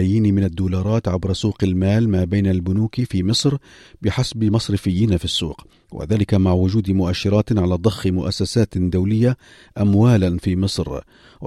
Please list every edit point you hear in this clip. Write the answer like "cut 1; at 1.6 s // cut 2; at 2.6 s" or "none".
none